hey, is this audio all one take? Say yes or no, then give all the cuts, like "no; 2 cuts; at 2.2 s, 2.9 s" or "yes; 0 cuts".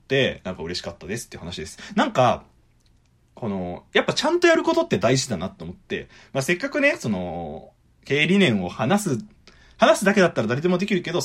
yes; 0 cuts